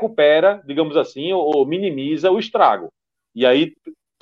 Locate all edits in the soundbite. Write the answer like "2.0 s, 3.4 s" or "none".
none